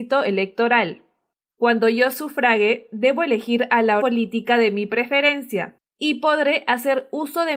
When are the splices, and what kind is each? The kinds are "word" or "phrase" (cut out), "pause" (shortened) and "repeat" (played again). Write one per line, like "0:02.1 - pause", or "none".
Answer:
0:04.0 - word